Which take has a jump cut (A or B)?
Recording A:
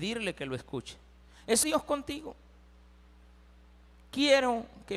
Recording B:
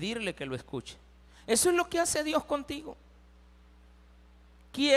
A